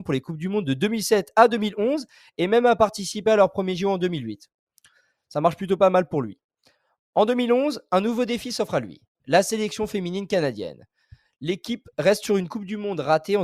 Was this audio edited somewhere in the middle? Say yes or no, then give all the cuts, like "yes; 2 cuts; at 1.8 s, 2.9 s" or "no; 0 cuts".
no; 0 cuts